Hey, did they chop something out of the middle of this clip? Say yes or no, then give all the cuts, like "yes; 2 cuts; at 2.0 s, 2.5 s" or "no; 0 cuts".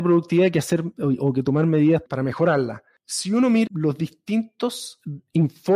yes; 2 cuts; at 2.1 s, 3.7 s